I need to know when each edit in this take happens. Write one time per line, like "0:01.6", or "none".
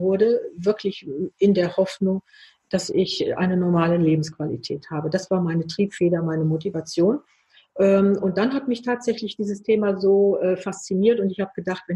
none